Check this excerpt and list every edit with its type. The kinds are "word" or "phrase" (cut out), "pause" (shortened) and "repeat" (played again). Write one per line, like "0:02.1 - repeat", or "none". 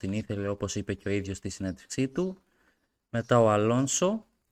none